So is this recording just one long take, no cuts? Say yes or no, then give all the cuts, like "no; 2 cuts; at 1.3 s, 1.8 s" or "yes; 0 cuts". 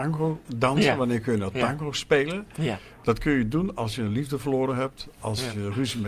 yes; 0 cuts